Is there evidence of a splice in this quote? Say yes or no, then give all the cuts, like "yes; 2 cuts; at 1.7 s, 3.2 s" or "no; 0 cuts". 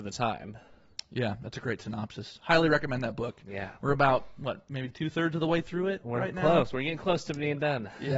no; 0 cuts